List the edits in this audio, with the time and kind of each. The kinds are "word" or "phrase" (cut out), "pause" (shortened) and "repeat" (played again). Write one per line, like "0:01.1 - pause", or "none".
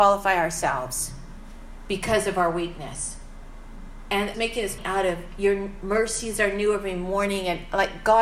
0:04.3 - phrase
0:04.8 - word